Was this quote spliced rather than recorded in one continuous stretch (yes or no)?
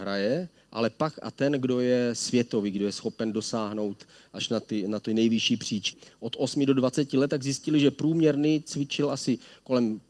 no